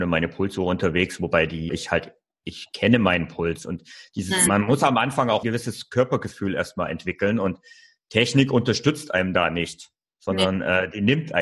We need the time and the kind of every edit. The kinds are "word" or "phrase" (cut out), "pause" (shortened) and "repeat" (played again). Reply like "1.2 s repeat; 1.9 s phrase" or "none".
1.7 s word; 4.5 s word; 5.4 s word

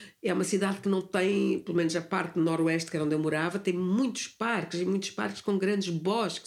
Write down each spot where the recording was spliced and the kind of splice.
none

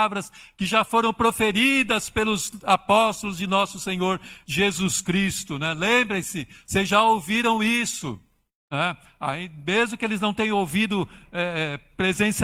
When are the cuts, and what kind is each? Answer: none

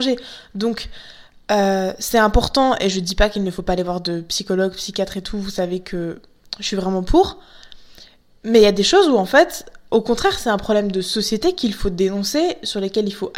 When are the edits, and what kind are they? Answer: none

